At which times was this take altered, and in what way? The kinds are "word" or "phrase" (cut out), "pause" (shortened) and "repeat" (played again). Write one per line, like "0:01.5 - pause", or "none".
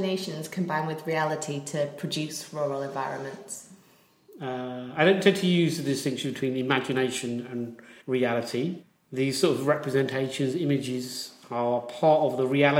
0:08.0 - pause